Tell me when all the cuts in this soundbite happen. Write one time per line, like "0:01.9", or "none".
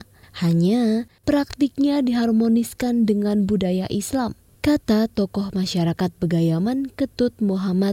none